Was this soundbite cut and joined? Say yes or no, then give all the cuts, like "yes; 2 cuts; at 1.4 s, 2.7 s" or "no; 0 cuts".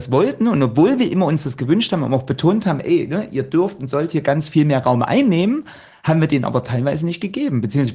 no; 0 cuts